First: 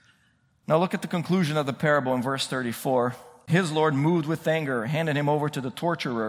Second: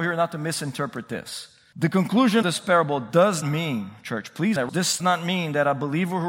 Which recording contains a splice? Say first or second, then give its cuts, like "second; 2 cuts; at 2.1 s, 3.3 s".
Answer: second; 4 cuts; at 2.4 s, 3.4 s, 4.6 s, 5.0 s